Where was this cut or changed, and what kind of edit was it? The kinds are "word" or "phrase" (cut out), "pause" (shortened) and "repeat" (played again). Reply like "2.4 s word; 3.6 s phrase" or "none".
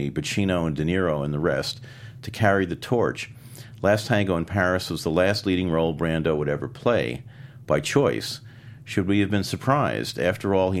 none